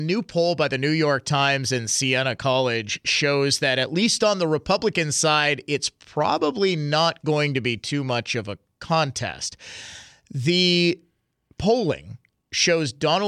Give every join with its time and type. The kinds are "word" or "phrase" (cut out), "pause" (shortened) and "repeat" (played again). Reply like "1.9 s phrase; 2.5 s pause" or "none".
none